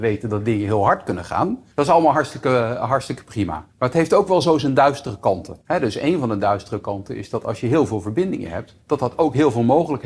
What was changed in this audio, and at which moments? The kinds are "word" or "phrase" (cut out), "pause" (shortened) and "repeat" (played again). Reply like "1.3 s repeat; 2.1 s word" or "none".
1.7 s pause; 3.7 s pause; 5.6 s pause; 8.8 s pause